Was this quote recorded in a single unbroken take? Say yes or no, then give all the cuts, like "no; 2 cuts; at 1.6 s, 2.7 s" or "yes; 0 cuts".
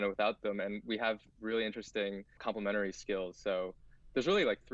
yes; 0 cuts